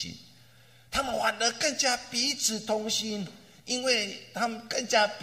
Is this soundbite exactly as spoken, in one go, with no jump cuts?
yes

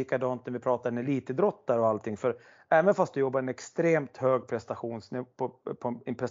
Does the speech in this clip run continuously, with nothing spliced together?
yes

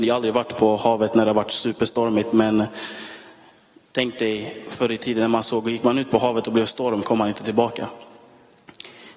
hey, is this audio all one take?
no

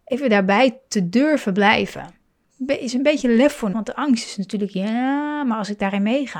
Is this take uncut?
no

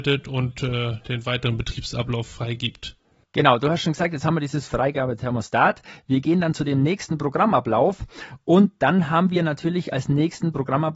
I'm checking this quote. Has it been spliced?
no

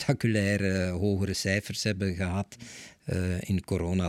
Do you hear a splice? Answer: no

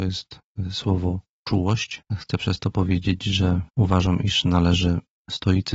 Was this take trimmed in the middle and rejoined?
yes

